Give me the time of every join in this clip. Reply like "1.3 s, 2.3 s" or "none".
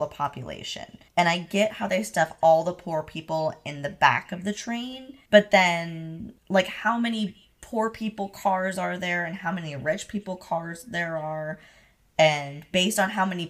1.1 s, 5.2 s, 6.4 s